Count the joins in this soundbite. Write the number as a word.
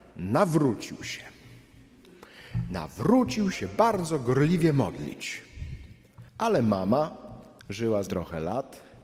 four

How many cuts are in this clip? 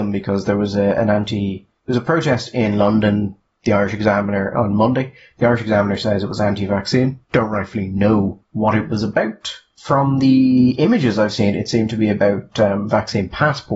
zero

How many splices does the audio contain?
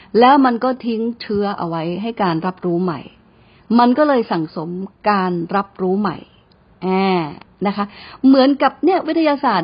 one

